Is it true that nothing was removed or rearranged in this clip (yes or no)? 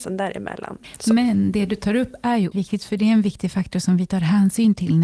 no